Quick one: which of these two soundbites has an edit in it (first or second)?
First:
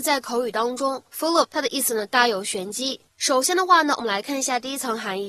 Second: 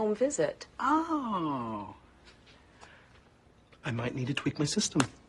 first